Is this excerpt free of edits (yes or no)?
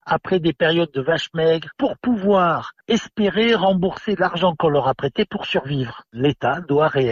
yes